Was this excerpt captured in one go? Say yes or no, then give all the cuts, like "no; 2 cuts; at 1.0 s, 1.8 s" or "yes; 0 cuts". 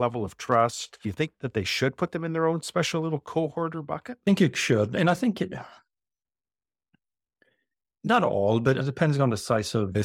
yes; 0 cuts